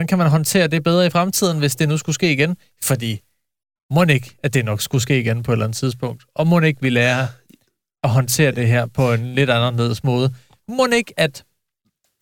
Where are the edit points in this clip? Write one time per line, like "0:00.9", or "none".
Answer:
none

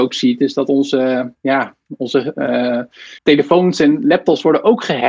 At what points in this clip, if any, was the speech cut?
0:03.2

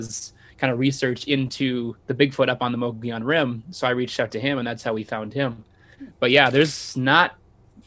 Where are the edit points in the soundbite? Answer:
0:02.0

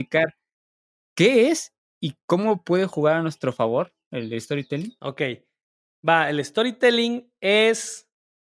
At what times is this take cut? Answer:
none

